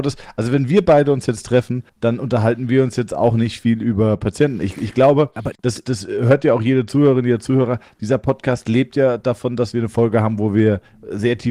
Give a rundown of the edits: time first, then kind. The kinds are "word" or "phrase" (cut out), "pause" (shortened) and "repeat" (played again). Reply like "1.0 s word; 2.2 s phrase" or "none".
1.9 s pause; 5.6 s pause